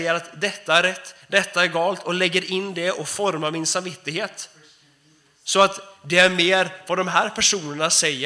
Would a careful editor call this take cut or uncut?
uncut